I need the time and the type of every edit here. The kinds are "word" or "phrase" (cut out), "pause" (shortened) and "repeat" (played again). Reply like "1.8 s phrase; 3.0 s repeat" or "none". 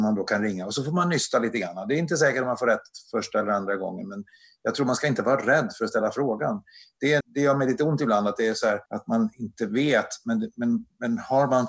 7.2 s word; 8.9 s pause